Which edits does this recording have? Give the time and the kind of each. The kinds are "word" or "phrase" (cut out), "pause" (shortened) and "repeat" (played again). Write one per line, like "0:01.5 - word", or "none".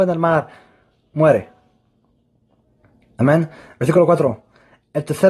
none